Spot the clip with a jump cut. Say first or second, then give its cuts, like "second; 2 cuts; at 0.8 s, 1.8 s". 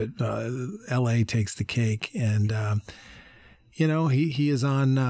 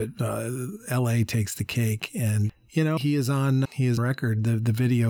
second; 4 cuts; at 2.5 s, 3.0 s, 3.6 s, 4.0 s